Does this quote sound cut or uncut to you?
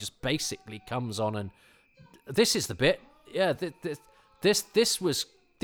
uncut